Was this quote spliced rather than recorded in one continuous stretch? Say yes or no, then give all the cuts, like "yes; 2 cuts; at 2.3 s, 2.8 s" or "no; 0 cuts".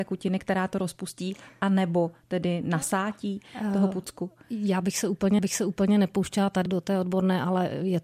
yes; 2 cuts; at 5.4 s, 6.7 s